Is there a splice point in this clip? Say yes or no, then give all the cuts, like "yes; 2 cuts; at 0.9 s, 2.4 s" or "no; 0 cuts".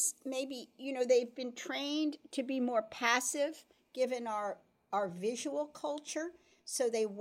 no; 0 cuts